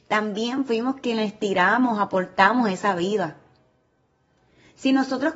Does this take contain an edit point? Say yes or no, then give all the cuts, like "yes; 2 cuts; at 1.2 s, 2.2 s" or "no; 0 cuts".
no; 0 cuts